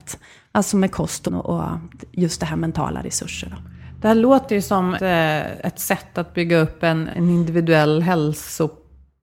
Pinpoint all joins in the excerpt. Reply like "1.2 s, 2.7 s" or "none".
1.3 s, 5.0 s, 7.1 s